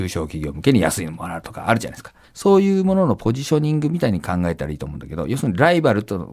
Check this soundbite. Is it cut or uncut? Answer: cut